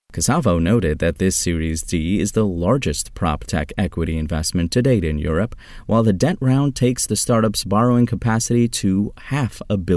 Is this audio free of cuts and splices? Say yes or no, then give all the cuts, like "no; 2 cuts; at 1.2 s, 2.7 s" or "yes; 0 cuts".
yes; 0 cuts